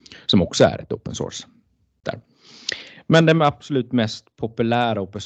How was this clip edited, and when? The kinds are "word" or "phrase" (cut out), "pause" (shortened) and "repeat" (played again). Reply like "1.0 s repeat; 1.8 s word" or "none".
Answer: 2.0 s word